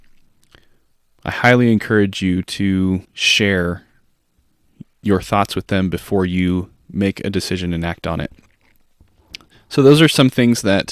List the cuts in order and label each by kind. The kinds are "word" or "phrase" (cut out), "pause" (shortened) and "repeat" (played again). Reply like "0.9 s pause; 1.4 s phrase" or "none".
3.0 s pause